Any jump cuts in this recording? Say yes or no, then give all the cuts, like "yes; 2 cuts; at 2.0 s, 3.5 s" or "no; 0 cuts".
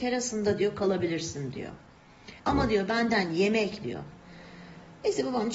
yes; 2 cuts; at 2.4 s, 3.8 s